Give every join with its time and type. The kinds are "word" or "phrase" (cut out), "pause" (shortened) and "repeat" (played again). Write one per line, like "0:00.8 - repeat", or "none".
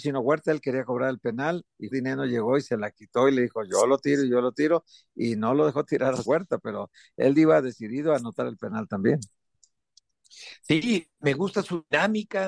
0:01.9 - word
0:06.2 - word